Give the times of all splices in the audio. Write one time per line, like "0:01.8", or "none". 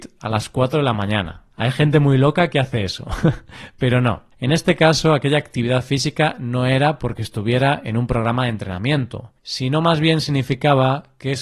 0:01.5
0:04.3
0:09.4